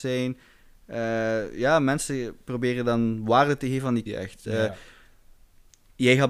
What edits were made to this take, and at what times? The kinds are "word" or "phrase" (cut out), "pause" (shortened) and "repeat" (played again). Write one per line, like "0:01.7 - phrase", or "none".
0:04.1 - word